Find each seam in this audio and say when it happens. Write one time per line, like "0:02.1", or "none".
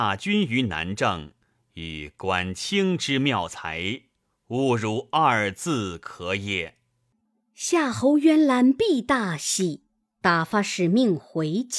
none